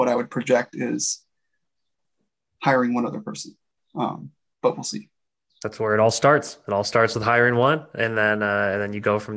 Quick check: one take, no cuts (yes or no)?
yes